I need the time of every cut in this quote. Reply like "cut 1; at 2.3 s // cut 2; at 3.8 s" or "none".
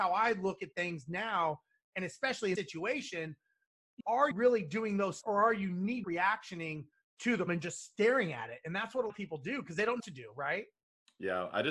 cut 1; at 2.5 s // cut 2; at 4.0 s // cut 3; at 4.3 s // cut 4; at 5.2 s // cut 5; at 6.0 s // cut 6; at 7.5 s // cut 7; at 9.1 s // cut 8; at 10.0 s

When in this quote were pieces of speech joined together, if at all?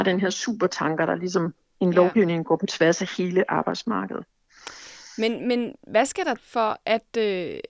cut 1; at 6.4 s

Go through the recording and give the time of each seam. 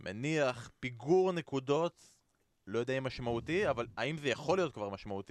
none

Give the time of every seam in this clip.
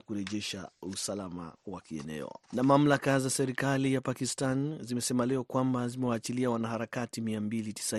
cut 1; at 2.4 s

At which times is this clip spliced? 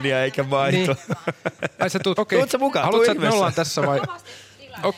cut 1; at 2.2 s

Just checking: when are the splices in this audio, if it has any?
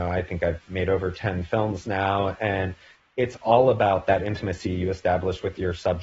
none

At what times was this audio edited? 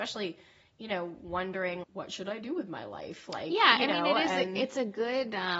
cut 1; at 1.8 s

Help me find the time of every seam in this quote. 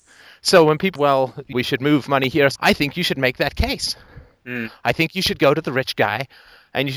cut 1; at 1.0 s // cut 2; at 1.5 s // cut 3; at 2.6 s

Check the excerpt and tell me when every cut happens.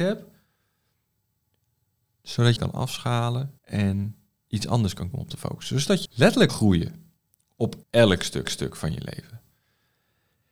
cut 1; at 2.6 s // cut 2; at 3.6 s // cut 3; at 5.1 s // cut 4; at 6.1 s // cut 5; at 6.5 s // cut 6; at 7.8 s // cut 7; at 8.5 s

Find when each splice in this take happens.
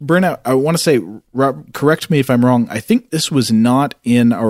none

